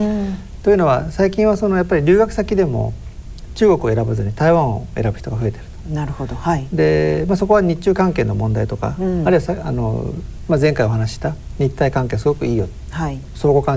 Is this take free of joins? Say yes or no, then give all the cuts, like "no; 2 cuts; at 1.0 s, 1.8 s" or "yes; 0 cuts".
yes; 0 cuts